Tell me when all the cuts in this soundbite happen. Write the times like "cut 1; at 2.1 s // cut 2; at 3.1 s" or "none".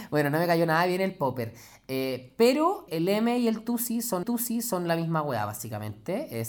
cut 1; at 2.9 s // cut 2; at 4.2 s